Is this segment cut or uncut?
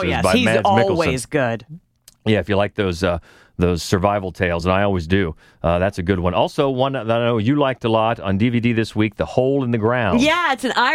uncut